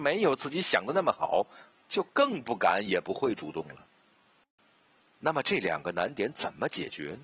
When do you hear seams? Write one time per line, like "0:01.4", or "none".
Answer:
none